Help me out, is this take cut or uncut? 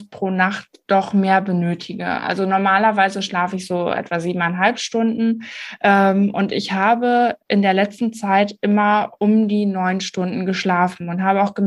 uncut